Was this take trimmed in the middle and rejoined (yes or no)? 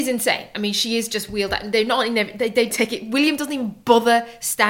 yes